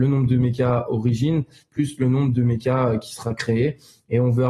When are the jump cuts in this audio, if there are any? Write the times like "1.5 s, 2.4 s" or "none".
none